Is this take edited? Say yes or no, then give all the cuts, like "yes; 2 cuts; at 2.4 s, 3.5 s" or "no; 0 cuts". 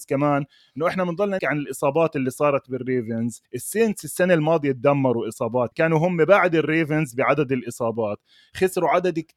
yes; 3 cuts; at 1.4 s, 3.4 s, 5.7 s